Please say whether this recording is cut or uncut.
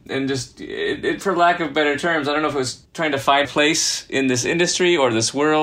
cut